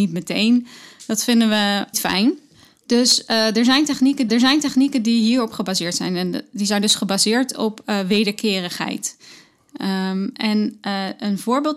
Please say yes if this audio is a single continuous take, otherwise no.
no